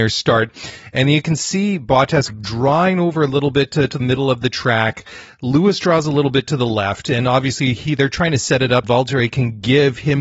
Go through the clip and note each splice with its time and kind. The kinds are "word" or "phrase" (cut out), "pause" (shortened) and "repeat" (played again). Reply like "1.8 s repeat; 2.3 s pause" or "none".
2.3 s word; 4.0 s word; 6.4 s word; 8.8 s word